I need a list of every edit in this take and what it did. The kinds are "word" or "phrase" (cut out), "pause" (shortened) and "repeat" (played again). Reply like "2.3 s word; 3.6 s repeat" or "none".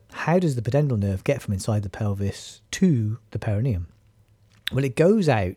3.3 s pause